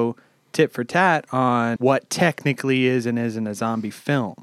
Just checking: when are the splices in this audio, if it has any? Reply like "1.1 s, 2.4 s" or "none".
1.8 s